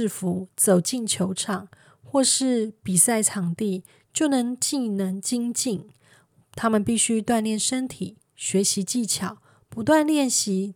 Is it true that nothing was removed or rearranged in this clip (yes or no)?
yes